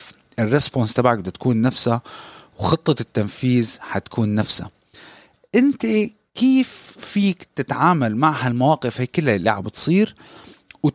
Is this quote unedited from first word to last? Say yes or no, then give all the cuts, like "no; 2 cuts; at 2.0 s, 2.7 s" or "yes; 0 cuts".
yes; 0 cuts